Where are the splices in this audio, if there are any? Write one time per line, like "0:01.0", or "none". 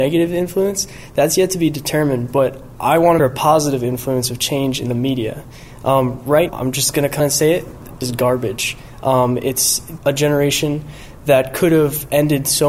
0:03.2
0:06.5
0:07.2
0:08.0
0:10.0